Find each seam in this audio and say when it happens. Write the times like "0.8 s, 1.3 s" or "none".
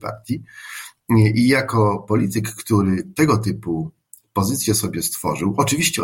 none